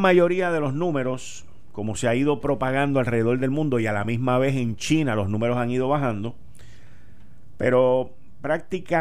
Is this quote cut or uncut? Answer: uncut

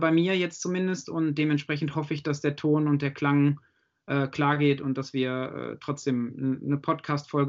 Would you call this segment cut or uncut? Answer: uncut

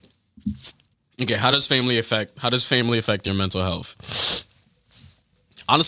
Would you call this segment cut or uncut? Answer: uncut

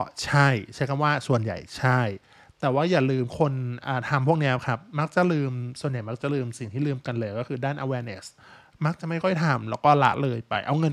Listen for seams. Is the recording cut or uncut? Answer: uncut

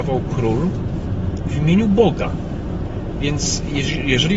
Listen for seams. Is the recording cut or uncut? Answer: uncut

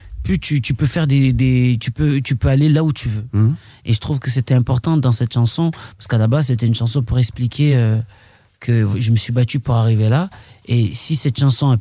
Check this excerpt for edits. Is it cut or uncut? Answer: uncut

